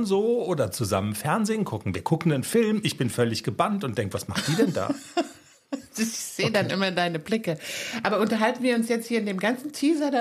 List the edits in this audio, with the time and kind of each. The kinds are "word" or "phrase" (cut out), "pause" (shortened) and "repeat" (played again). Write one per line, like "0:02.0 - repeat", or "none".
none